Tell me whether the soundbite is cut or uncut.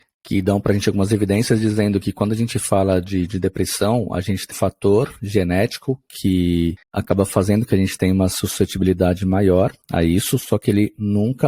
cut